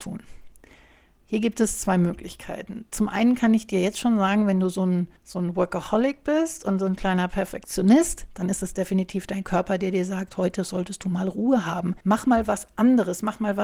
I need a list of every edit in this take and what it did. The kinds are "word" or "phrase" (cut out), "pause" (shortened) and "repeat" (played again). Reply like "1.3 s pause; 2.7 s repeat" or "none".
5.2 s pause; 12.0 s pause